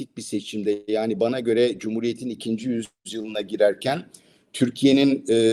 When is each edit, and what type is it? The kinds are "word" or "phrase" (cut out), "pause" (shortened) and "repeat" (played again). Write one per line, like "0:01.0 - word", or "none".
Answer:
none